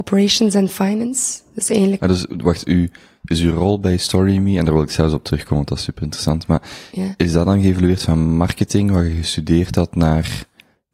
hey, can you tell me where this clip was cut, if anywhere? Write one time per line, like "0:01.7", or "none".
none